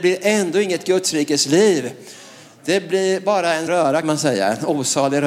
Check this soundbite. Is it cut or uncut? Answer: cut